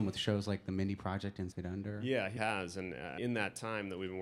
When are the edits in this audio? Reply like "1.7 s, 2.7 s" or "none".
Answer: 1.5 s, 2.4 s, 3.2 s